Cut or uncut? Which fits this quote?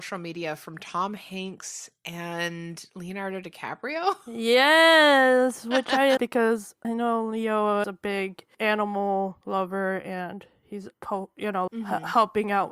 cut